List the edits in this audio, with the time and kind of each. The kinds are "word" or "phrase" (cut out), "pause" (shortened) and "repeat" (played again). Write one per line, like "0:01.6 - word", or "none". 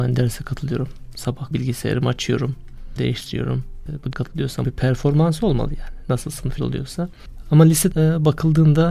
0:01.5 - word
0:03.0 - word
0:04.1 - word
0:04.6 - word
0:06.6 - word
0:07.9 - word